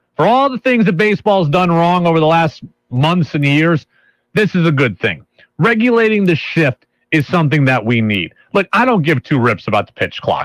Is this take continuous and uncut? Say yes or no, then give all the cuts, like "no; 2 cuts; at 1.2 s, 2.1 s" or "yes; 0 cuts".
yes; 0 cuts